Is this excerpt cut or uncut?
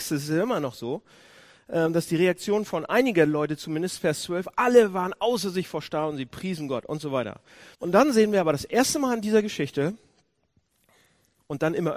cut